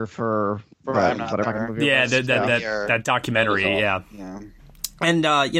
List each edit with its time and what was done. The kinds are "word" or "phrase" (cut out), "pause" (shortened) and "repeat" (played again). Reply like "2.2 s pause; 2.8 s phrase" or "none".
1.4 s word